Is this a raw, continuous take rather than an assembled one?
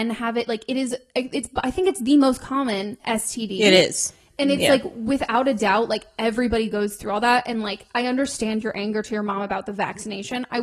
yes; 0 cuts

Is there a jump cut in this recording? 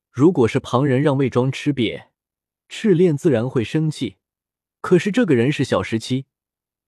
no; 0 cuts

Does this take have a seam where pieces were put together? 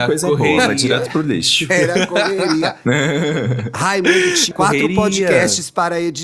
yes; 1 cut; at 4.5 s

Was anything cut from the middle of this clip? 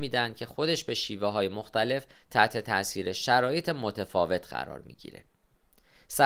no; 0 cuts

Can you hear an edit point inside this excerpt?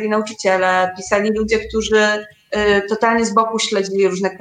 no; 0 cuts

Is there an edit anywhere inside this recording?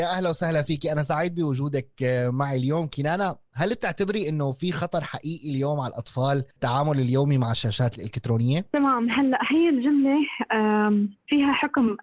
yes; 1 cut; at 6.5 s

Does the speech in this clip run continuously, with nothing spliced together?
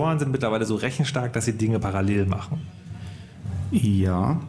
yes; 0 cuts

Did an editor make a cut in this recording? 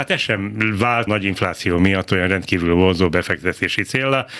yes; 1 cut; at 1.1 s

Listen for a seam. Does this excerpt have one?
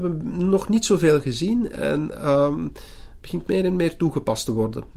no; 0 cuts

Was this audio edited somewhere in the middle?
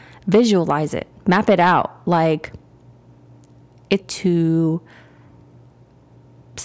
yes; 1 cut; at 4.0 s

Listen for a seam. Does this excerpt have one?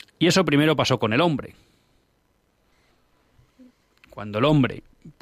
no; 0 cuts

